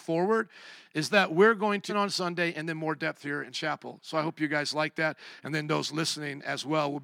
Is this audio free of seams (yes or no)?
no